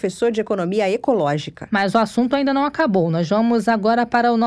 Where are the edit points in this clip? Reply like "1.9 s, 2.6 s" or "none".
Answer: none